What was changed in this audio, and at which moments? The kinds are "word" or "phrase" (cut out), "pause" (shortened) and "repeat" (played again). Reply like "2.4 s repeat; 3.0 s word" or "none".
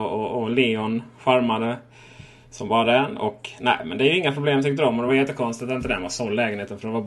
none